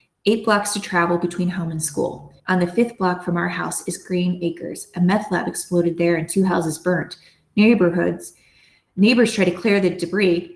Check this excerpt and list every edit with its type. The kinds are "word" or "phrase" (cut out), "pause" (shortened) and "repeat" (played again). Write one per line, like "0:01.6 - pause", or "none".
0:02.4 - pause